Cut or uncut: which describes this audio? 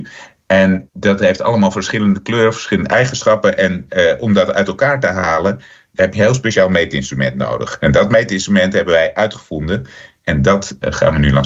uncut